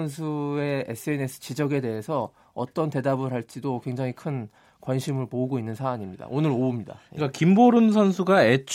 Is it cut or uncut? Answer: uncut